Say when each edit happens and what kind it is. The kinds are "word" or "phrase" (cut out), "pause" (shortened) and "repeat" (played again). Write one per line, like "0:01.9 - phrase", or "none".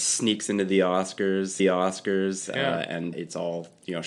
0:01.6 - repeat
0:03.1 - word